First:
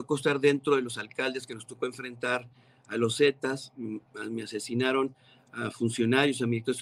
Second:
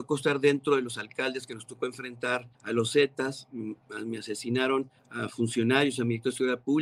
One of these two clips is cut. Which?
second; 2 cuts; at 2.5 s, 5.0 s

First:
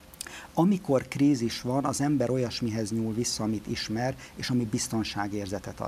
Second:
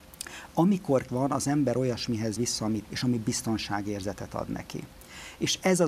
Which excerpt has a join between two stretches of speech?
second; 3 cuts; at 1.1 s, 2.4 s, 2.8 s

